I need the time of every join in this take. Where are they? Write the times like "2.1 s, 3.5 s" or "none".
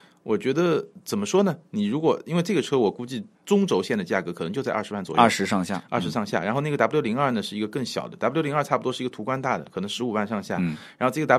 3.3 s